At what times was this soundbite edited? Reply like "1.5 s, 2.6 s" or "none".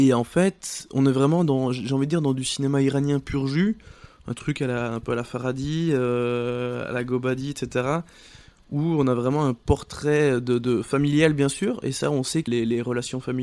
12.5 s